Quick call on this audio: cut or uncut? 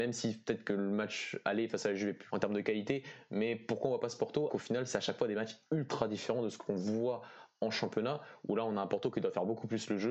cut